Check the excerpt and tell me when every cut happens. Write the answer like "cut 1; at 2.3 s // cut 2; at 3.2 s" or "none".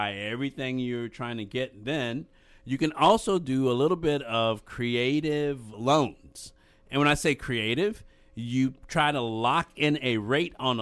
none